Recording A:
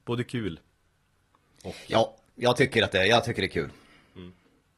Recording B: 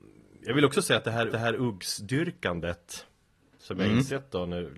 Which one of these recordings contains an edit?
B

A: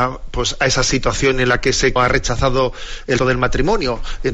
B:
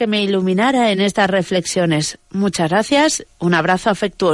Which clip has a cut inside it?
A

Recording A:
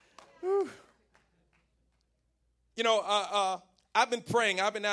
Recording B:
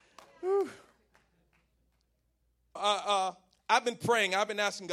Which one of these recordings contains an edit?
B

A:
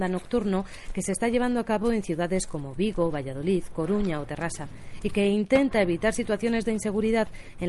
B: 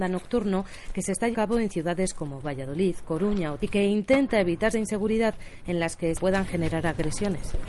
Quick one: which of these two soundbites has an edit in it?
B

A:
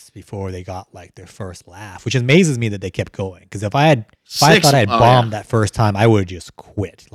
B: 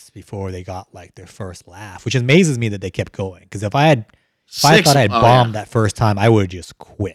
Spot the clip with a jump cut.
A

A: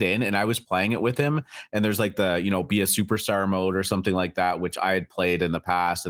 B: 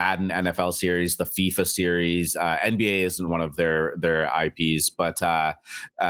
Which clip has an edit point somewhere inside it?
B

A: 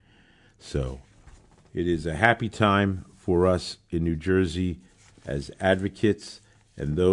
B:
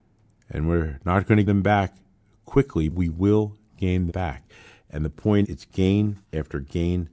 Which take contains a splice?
B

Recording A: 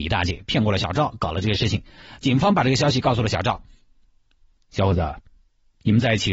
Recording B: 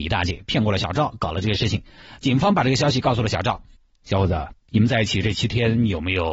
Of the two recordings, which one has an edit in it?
B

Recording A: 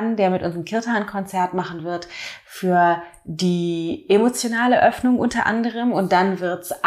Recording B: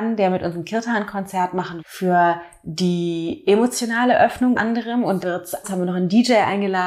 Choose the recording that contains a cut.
B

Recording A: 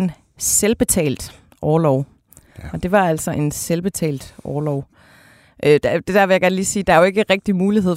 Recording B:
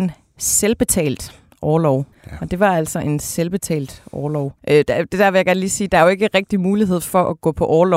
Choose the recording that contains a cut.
B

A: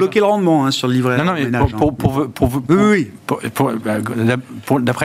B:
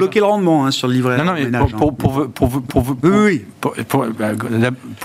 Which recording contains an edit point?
B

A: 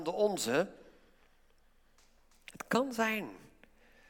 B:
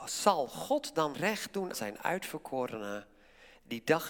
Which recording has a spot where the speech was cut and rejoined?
B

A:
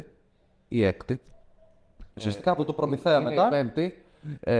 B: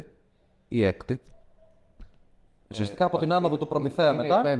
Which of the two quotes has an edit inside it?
A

